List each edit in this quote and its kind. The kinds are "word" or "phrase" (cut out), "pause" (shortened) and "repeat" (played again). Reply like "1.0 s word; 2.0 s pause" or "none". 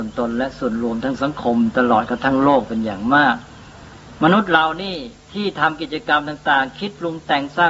5.2 s pause